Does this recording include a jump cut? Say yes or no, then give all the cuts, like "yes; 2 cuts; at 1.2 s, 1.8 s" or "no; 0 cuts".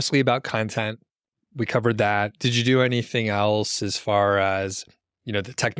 no; 0 cuts